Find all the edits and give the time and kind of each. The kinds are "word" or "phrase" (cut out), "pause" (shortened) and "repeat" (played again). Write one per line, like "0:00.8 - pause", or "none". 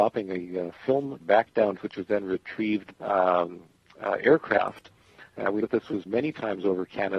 0:01.2 - word
0:01.8 - word
0:02.9 - word
0:05.6 - word
0:06.0 - word

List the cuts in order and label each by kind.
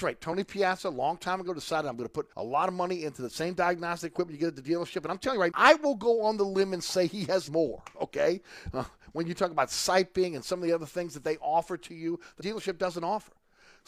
0:02.3 - pause
0:05.5 - word
0:07.5 - word
0:12.4 - phrase

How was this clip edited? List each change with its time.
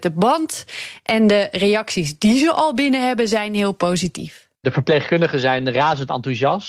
0:04.5 - pause

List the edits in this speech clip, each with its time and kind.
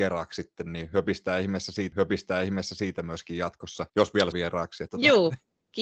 0:01.9 - repeat
0:03.9 - pause
0:04.3 - word
0:04.9 - word

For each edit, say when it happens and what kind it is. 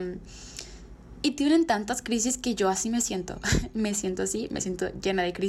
0:03.7 - word

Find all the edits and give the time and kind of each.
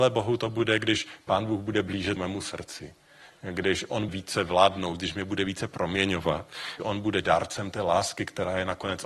0:02.2 - word
0:04.1 - word
0:06.8 - word
0:07.2 - word

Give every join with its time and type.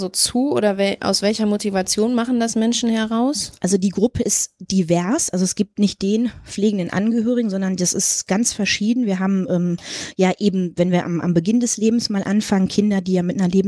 none

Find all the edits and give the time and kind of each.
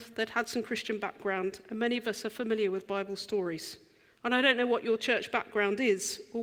none

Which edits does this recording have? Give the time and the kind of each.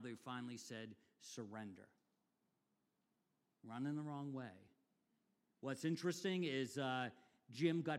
none

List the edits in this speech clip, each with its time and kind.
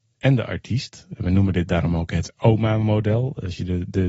none

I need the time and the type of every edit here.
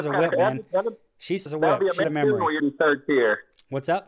0:01.5 - word
0:02.0 - word
0:02.6 - word

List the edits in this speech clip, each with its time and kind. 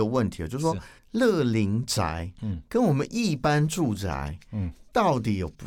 0:01.0 - pause

